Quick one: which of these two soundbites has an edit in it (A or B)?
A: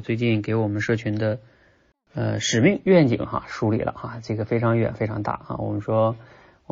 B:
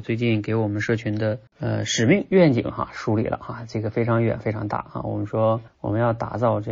B